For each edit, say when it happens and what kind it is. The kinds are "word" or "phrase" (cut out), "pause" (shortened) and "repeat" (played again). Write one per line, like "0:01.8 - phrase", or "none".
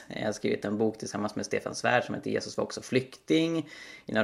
none